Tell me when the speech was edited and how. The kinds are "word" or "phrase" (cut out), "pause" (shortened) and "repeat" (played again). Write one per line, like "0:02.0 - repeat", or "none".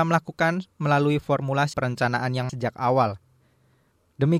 0:01.7 - word
0:02.5 - word